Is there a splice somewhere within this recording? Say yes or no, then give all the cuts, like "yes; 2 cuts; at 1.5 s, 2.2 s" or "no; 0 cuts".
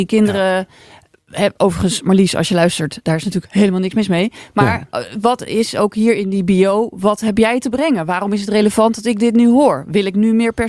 no; 0 cuts